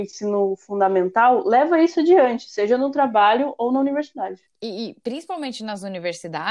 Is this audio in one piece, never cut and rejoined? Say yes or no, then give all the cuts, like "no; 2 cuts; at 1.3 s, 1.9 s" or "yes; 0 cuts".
yes; 0 cuts